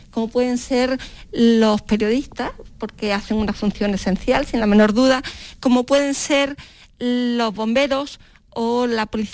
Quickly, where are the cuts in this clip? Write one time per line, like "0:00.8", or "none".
none